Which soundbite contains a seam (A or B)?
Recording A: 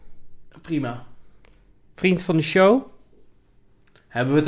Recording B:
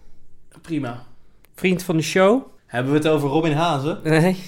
B